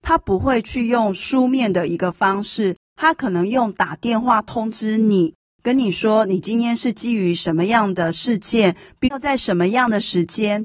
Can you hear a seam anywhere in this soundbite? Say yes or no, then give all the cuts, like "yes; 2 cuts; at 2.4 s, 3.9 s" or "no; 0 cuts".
no; 0 cuts